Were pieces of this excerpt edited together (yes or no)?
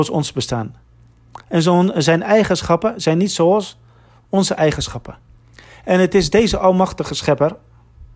no